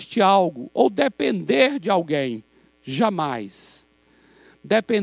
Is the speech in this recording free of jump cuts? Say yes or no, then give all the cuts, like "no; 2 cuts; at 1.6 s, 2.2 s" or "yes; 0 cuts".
yes; 0 cuts